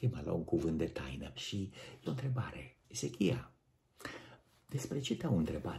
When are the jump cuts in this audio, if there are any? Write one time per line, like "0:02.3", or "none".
0:01.4
0:02.1
0:02.8